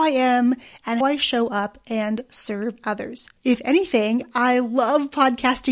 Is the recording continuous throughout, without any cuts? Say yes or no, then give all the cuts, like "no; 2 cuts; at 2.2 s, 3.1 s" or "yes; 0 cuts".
no; 2 cuts; at 1.0 s, 3.4 s